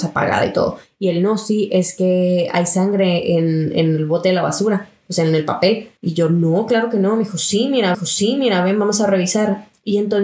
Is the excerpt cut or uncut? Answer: cut